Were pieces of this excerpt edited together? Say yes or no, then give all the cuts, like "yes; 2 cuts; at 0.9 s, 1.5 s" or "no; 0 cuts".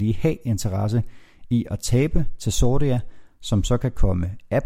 no; 0 cuts